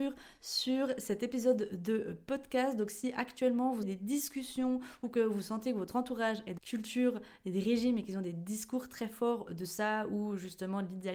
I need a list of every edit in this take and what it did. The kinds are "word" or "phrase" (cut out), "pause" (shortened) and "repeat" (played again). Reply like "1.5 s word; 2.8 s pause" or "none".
3.8 s word; 6.6 s word; 9.5 s word